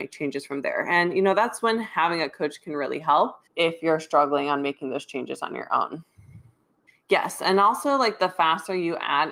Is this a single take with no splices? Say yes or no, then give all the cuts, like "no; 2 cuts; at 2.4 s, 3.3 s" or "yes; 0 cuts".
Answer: no; 2 cuts; at 3.5 s, 6.9 s